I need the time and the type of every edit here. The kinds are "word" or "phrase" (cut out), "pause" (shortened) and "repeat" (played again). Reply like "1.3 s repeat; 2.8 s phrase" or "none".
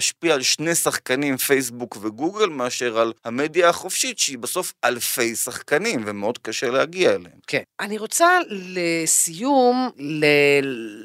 3.2 s pause; 7.4 s pause; 9.9 s pause